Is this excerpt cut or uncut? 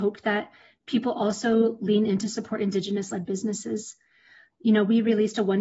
uncut